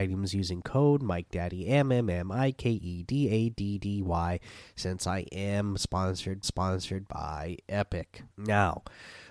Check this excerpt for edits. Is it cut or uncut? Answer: cut